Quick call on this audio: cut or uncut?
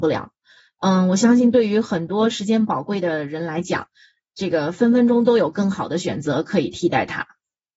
uncut